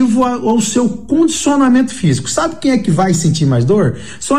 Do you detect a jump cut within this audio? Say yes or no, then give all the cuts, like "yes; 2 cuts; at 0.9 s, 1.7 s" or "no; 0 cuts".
no; 0 cuts